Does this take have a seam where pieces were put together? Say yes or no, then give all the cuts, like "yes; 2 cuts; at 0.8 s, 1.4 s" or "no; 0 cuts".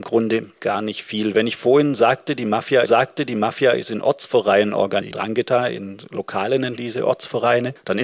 yes; 3 cuts; at 2.8 s, 5.0 s, 6.8 s